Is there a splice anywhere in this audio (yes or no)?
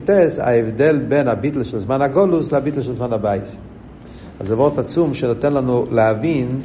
no